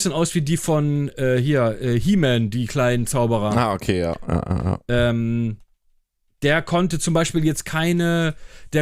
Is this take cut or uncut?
uncut